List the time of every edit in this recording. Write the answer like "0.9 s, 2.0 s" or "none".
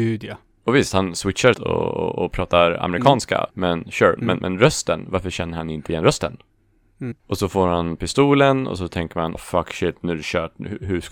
1.5 s, 3.5 s, 4.2 s, 7.2 s, 9.3 s